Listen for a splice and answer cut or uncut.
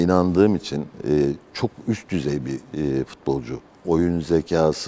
uncut